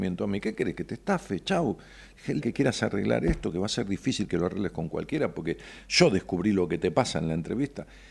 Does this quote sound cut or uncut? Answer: cut